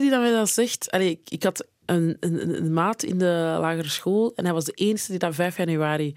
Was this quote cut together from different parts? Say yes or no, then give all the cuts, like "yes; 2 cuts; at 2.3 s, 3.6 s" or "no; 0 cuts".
no; 0 cuts